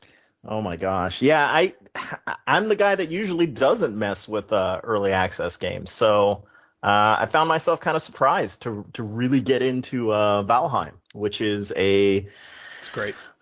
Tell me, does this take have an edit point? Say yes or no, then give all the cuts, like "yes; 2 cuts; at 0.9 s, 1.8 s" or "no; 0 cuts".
yes; 1 cut; at 11.0 s